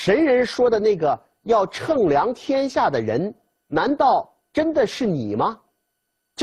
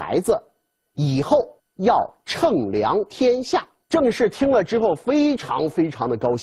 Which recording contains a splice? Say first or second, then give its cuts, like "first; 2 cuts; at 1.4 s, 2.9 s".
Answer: second; 2 cuts; at 1.6 s, 3.8 s